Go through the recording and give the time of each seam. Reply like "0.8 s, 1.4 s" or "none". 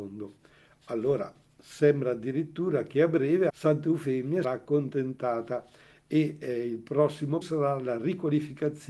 3.5 s, 4.4 s, 7.4 s